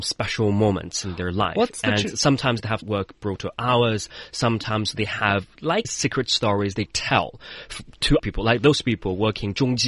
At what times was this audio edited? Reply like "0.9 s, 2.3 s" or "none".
2.8 s, 5.8 s, 6.9 s, 8.2 s

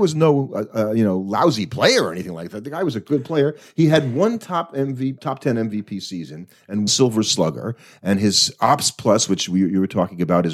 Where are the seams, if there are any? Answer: 5.2 s, 6.9 s

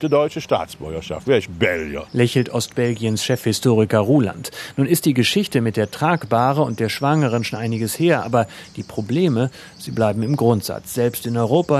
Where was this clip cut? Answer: 1.2 s

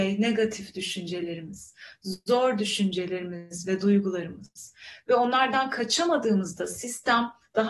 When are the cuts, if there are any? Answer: none

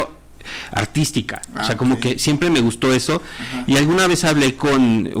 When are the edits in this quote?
none

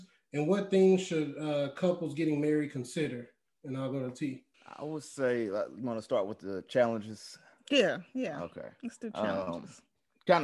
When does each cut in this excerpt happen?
4.5 s

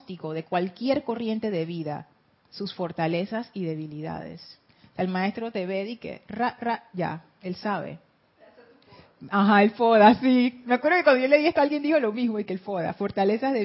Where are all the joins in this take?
none

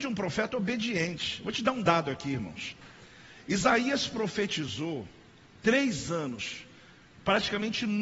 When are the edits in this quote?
none

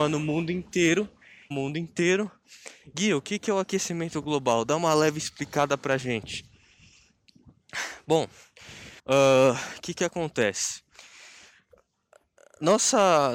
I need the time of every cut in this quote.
1.5 s, 9.0 s

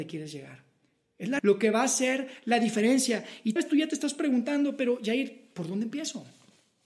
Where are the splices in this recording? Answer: 1.4 s, 3.6 s

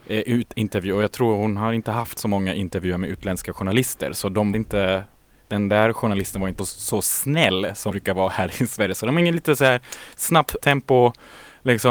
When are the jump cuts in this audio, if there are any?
4.5 s, 6.6 s, 7.9 s, 10.6 s

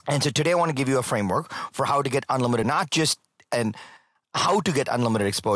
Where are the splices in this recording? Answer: 2.6 s

